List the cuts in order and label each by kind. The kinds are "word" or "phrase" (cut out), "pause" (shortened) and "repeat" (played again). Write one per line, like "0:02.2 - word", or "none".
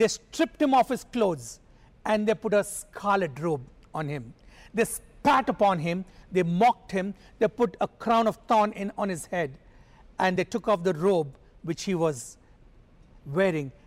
none

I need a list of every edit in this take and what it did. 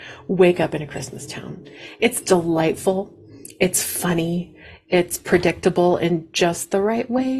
none

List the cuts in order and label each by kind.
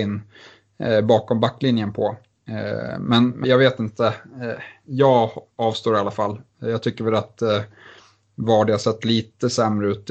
0:03.4 - word

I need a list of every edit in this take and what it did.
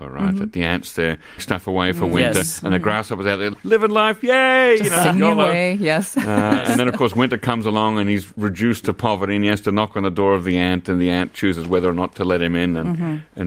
0:01.4 - word

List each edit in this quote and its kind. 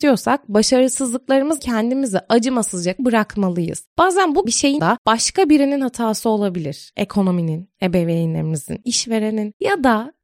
0:01.6 - word
0:03.0 - word
0:04.5 - word
0:04.8 - word
0:08.8 - word

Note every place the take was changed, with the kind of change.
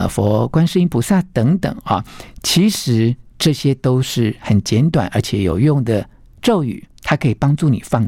none

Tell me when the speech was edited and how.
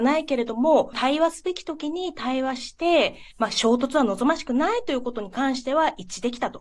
0:03.3 - pause

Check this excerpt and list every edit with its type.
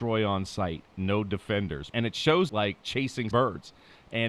0:01.9 - word
0:02.5 - word
0:03.3 - word

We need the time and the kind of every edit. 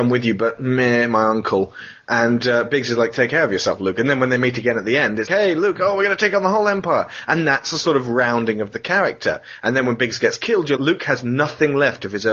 0:05.3 - word
0:10.8 - word

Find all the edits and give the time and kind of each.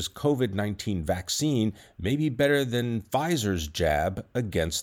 none

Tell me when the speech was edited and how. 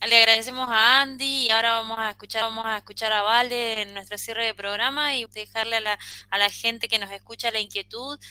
0:02.4 - repeat
0:05.3 - word

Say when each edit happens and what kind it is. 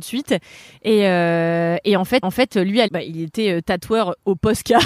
0:02.2 - repeat
0:02.9 - word

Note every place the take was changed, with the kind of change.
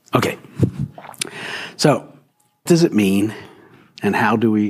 0:02.7 - word

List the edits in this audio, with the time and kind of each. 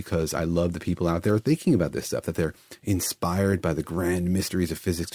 none

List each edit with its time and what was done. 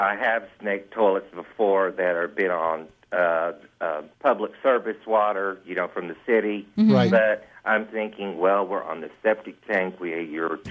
0:04.1 - pause

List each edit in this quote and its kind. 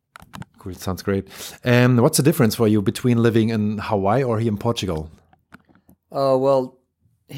none

